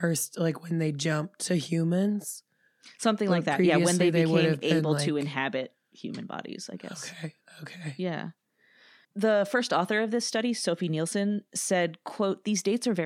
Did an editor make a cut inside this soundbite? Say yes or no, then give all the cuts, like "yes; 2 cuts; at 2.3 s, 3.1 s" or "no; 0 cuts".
no; 0 cuts